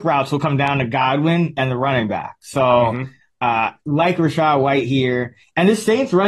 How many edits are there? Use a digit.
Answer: 0